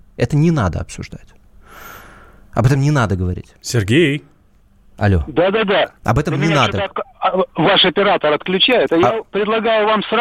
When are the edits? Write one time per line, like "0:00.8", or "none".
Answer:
none